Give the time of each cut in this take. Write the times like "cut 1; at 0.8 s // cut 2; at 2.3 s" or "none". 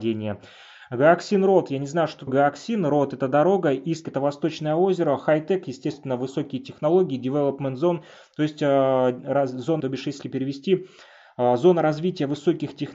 cut 1; at 2.3 s // cut 2; at 4.0 s // cut 3; at 9.8 s // cut 4; at 10.2 s

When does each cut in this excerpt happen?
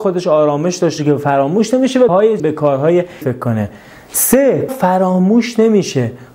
cut 1; at 1.0 s // cut 2; at 2.1 s // cut 3; at 2.4 s // cut 4; at 3.2 s // cut 5; at 4.7 s

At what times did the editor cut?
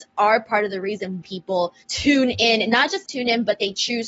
cut 1; at 1.2 s // cut 2; at 1.8 s // cut 3; at 3.1 s

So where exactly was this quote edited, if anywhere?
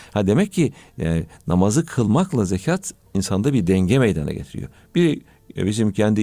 none

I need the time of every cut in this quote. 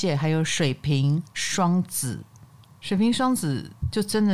cut 1; at 2.7 s

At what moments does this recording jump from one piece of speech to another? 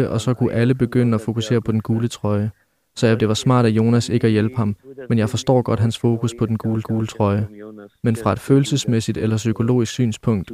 cut 1; at 3.2 s // cut 2; at 6.8 s

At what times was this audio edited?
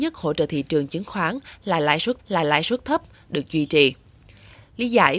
cut 1; at 2.2 s

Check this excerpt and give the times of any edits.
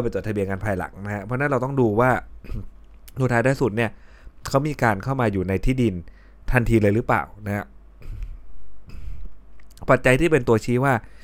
none

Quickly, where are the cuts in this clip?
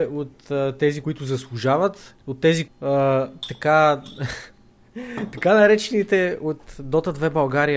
cut 1; at 1.0 s // cut 2; at 2.2 s // cut 3; at 2.7 s

